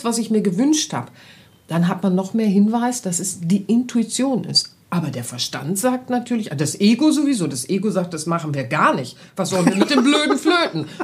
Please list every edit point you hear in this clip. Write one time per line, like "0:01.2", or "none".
none